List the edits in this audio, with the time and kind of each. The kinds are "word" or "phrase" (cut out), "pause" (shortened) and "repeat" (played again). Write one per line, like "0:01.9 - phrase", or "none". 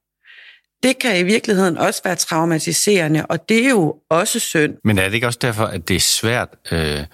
0:04.8 - pause